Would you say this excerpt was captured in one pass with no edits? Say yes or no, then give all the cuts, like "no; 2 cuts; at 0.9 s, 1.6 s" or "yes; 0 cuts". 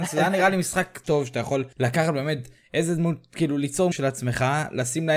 no; 3 cuts; at 1.0 s, 1.7 s, 3.9 s